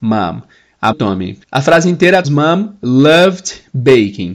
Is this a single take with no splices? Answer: no; 3 cuts; at 0.9 s, 1.4 s, 2.2 s

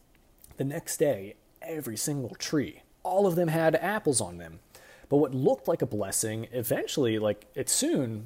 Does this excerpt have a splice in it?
yes; 1 cut; at 2.9 s

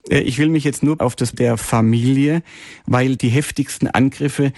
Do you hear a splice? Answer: yes; 3 cuts; at 1.0 s, 1.3 s, 3.2 s

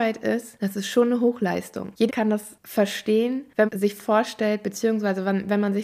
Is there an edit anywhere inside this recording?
yes; 2 cuts; at 2.1 s, 3.7 s

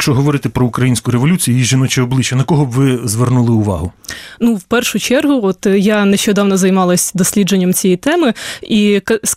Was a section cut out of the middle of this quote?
no; 0 cuts

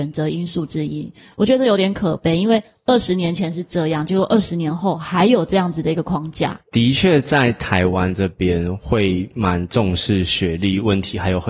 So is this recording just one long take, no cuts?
yes; 0 cuts

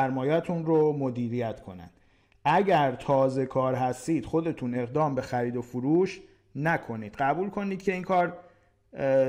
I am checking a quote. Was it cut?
no; 0 cuts

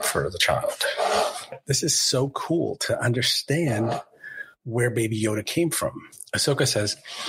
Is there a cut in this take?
no; 0 cuts

